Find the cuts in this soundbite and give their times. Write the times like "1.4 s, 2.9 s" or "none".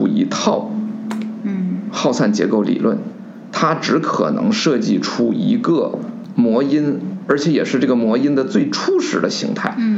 none